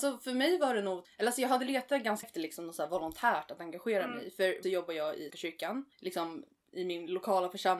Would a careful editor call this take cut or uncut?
cut